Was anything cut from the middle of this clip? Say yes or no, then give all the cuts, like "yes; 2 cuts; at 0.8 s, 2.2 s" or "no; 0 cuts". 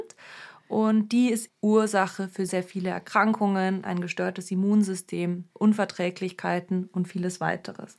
yes; 3 cuts; at 1.5 s, 2.5 s, 5.5 s